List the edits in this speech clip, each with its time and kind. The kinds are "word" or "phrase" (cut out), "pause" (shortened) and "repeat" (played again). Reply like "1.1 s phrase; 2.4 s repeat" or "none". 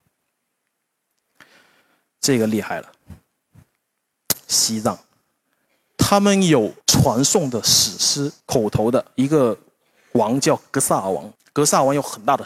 6.8 s pause; 8.4 s pause